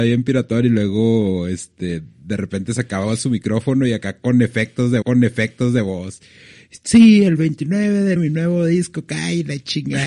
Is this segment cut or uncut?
cut